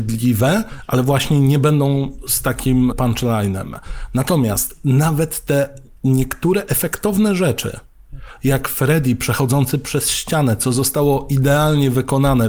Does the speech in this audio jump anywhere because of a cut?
yes; 1 cut; at 2.9 s

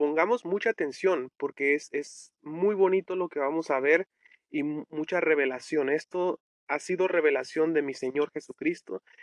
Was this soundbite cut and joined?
no; 0 cuts

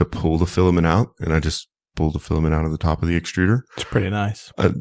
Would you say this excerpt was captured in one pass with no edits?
yes; 0 cuts

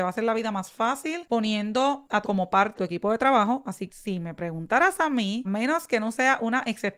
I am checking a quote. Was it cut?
yes; 4 cuts; at 2.2 s, 2.7 s, 3.9 s, 5.4 s

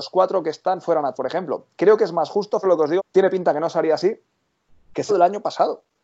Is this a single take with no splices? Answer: no; 4 cuts; at 1.1 s, 2.6 s, 3.0 s, 5.1 s

